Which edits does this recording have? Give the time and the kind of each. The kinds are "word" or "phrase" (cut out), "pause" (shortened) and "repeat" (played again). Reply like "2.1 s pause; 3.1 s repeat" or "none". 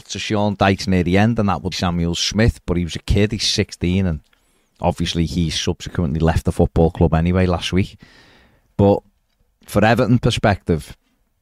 1.7 s phrase